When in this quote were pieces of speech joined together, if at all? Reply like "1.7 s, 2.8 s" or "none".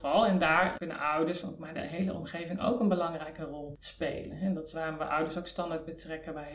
none